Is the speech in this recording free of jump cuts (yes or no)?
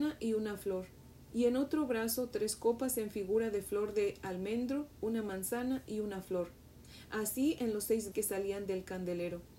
no